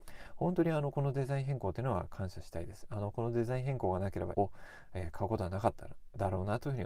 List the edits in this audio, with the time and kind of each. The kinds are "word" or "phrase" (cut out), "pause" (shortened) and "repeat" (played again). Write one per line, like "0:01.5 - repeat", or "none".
0:04.3 - word